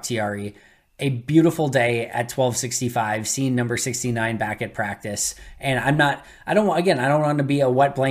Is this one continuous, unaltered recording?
yes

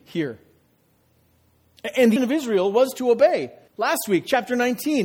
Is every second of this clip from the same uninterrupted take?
no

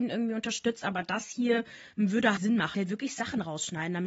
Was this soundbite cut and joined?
yes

